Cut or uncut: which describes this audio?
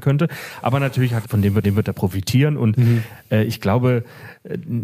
cut